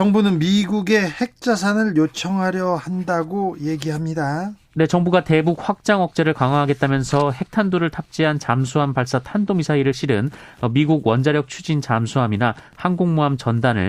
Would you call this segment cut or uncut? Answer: uncut